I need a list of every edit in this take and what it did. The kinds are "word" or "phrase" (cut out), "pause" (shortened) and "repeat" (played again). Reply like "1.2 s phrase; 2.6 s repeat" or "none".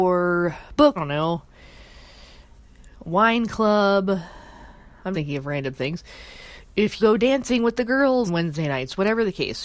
1.0 s phrase; 5.1 s word; 7.0 s word; 8.3 s word

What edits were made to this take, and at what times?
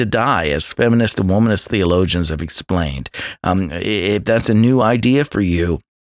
none

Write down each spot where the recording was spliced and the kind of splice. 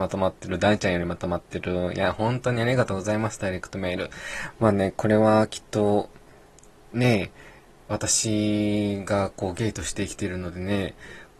none

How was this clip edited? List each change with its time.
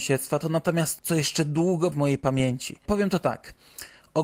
1.0 s word; 1.9 s word

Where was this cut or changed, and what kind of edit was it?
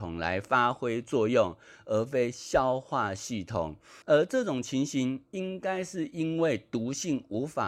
4.0 s pause

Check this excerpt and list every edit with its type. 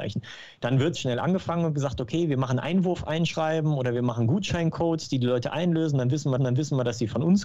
0.9 s word; 6.4 s repeat

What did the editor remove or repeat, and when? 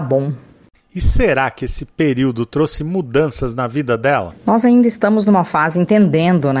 none

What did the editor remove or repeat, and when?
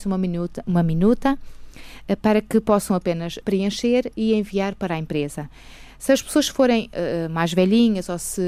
3.4 s word

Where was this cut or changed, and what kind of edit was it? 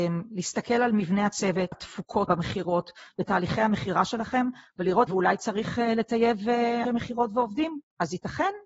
1.7 s phrase; 2.3 s word; 5.1 s phrase; 6.8 s word

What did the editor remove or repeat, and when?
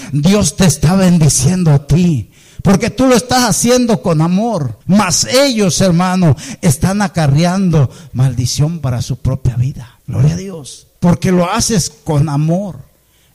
4.8 s pause; 10.0 s pause; 11.0 s pause

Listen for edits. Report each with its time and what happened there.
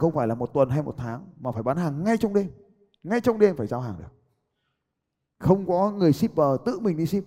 none

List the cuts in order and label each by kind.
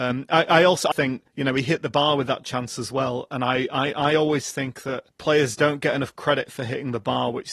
0.9 s word

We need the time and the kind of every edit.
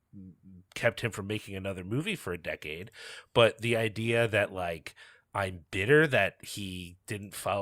none

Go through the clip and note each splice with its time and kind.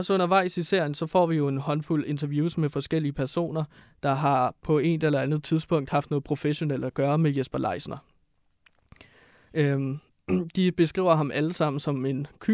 none

